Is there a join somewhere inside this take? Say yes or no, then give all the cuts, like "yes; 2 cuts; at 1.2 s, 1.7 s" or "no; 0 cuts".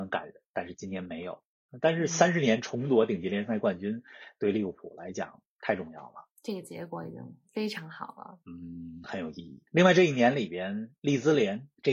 yes; 1 cut; at 9.7 s